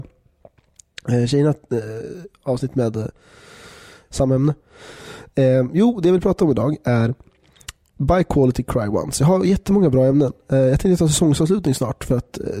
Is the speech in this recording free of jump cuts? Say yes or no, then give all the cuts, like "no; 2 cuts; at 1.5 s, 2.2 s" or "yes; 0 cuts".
yes; 0 cuts